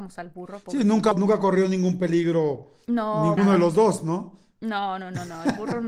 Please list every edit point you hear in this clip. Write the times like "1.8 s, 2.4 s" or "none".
1.1 s, 3.4 s